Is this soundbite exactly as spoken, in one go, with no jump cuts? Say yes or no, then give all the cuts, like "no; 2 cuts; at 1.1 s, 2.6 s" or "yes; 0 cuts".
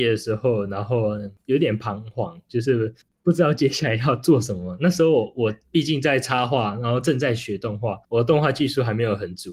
no; 2 cuts; at 3.0 s, 8.0 s